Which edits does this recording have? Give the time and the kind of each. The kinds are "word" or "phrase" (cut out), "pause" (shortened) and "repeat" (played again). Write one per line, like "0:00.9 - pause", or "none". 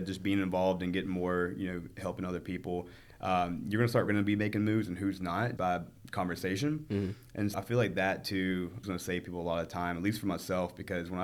0:04.1 - phrase
0:05.6 - word
0:07.5 - word
0:08.8 - phrase